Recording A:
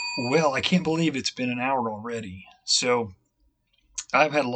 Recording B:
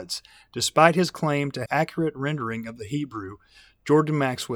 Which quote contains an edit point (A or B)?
B